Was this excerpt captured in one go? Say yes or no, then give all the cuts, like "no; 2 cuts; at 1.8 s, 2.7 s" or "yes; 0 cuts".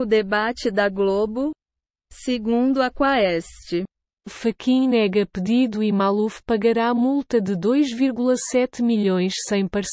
yes; 0 cuts